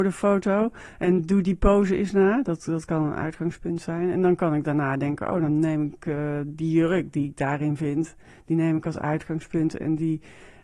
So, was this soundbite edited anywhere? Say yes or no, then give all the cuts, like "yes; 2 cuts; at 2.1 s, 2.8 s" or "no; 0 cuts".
no; 0 cuts